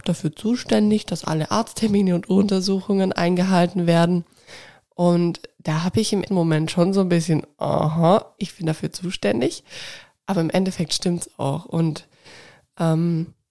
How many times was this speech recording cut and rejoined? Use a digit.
2